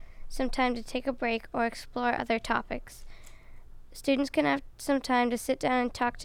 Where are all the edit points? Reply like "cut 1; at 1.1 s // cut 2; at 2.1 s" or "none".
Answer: none